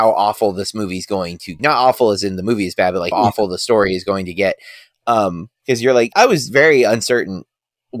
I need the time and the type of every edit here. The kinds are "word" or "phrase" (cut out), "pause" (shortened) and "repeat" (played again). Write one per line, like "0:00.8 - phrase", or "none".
0:01.6 - word
0:03.1 - word
0:05.5 - pause
0:06.1 - word